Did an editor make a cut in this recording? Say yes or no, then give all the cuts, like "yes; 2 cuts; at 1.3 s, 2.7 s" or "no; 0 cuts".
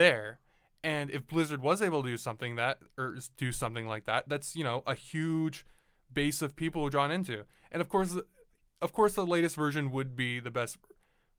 no; 0 cuts